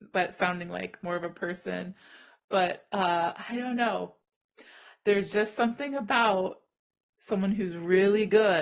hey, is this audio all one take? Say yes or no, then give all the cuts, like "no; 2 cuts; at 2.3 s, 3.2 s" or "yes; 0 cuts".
yes; 0 cuts